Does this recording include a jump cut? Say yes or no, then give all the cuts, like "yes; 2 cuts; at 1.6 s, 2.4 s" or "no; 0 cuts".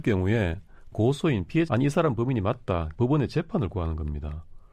yes; 3 cuts; at 0.9 s, 1.7 s, 3.0 s